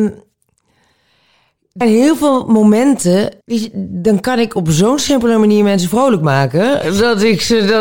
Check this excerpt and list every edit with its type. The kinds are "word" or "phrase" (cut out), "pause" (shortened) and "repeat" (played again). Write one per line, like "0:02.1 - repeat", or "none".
0:01.8 - word
0:03.4 - pause

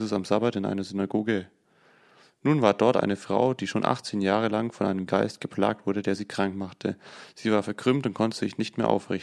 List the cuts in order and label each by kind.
0:05.1 - word

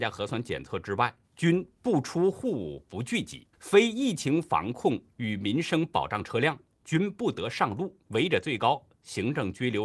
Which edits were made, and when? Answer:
0:01.2 - pause
0:03.5 - pause
0:08.0 - pause

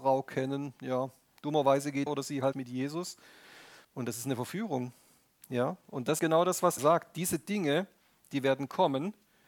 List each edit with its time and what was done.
0:02.1 - word
0:02.5 - word
0:03.8 - pause
0:06.2 - word
0:06.8 - word

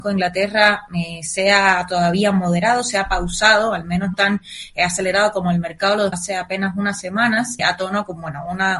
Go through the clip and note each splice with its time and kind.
0:04.1 - word
0:06.1 - word
0:07.6 - word

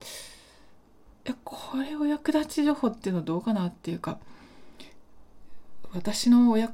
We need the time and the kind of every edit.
0:01.1 - pause

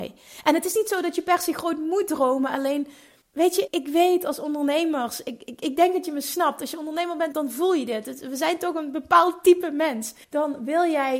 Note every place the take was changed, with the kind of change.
0:03.2 - pause
0:03.7 - word
0:07.3 - word
0:10.2 - pause

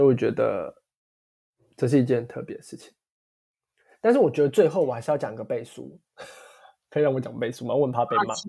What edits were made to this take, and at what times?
none

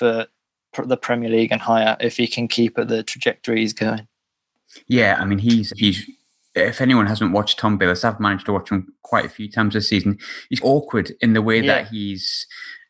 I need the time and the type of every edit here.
0:05.7 - word
0:10.6 - word

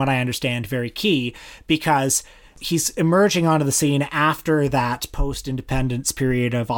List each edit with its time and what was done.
none

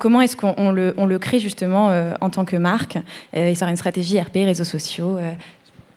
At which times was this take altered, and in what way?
0:03.6 - phrase

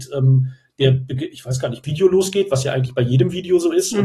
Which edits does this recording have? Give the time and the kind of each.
0:01.8 - phrase

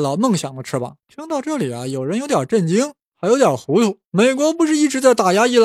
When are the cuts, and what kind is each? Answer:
0:01.0 - pause
0:04.0 - pause

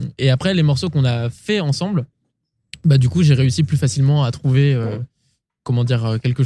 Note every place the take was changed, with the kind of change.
none

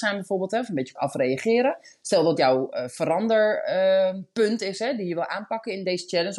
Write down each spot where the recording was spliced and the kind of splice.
0:01.0 - word
0:02.4 - word

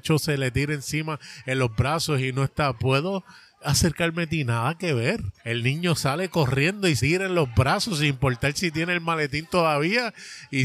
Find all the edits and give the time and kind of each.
0:02.7 - word
0:05.4 - pause
0:07.0 - word

